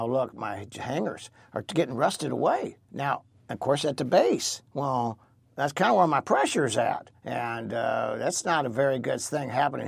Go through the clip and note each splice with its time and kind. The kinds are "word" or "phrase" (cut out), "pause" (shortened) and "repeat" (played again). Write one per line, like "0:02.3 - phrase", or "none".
0:02.8 - pause
0:04.7 - pause
0:07.2 - pause